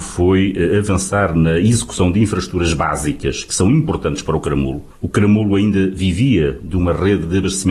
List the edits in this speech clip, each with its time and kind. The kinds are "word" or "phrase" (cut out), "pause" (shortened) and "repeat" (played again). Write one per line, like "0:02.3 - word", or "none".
0:04.9 - pause